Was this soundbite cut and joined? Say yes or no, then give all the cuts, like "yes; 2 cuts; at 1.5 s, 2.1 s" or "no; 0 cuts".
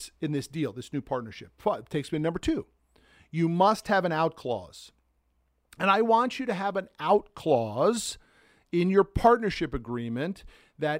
no; 0 cuts